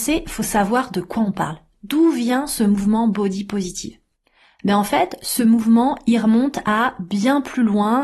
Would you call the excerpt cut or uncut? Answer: uncut